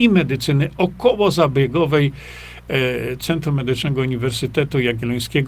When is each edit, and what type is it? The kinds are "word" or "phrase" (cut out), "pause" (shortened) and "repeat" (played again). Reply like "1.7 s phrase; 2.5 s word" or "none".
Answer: none